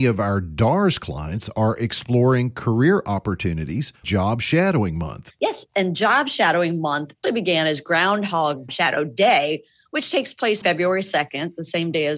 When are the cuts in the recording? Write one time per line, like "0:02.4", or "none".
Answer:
0:04.0
0:07.2
0:08.7
0:10.6